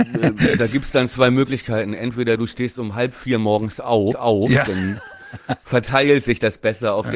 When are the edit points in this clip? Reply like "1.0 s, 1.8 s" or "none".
4.1 s